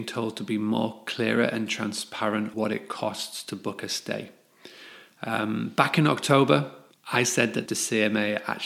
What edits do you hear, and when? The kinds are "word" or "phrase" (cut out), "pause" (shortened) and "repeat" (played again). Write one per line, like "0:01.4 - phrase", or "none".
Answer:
0:02.5 - word
0:06.9 - pause
0:07.7 - phrase